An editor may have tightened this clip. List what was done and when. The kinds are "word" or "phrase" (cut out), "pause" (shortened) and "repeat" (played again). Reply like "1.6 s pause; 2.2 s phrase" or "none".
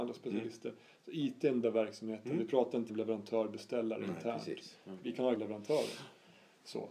1.6 s word; 2.9 s word; 5.3 s word